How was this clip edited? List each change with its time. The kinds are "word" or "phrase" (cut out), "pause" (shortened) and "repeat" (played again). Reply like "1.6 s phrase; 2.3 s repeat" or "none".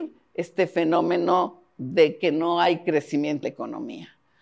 3.4 s word